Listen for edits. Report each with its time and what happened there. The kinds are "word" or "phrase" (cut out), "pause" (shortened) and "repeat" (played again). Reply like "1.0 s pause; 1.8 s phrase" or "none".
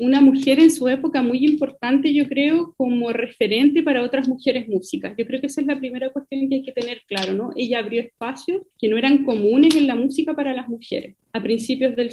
8.7 s pause